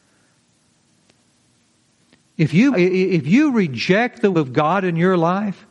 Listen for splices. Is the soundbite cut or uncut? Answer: cut